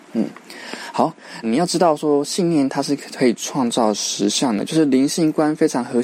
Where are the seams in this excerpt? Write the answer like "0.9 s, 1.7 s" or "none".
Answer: 1.4 s